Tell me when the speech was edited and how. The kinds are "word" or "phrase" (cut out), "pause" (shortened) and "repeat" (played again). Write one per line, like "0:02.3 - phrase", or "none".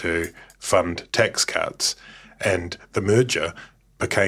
none